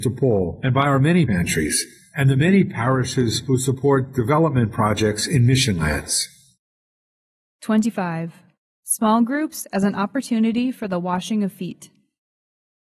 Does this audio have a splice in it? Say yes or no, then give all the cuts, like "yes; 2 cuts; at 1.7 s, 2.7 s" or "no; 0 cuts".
yes; 1 cut; at 1.3 s